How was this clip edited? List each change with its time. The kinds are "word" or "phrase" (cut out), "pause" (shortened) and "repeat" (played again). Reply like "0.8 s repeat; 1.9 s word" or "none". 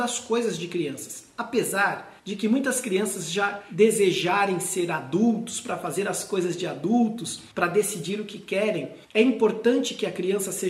2.2 s pause; 7.5 s pause; 9.0 s pause